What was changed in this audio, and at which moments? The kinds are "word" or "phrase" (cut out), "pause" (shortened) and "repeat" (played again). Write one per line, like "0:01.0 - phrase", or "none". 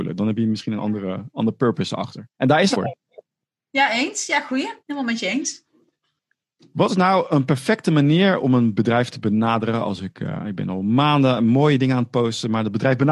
0:02.3 - pause
0:02.7 - phrase
0:04.8 - pause